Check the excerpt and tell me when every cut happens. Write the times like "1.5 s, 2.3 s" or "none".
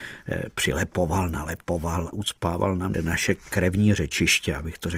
2.1 s, 2.9 s